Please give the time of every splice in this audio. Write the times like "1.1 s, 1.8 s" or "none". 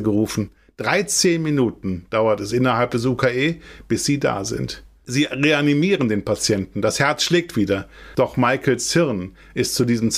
none